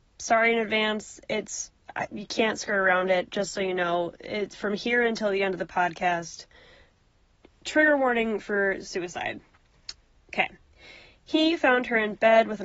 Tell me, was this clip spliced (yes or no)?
no